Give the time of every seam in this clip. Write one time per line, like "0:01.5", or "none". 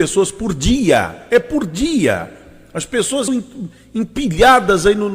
0:03.3